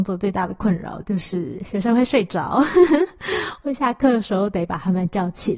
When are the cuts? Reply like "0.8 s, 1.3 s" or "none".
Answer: none